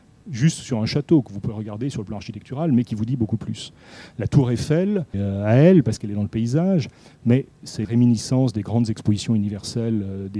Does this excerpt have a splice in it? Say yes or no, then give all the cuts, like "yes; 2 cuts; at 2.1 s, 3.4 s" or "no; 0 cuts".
yes; 2 cuts; at 5.1 s, 7.8 s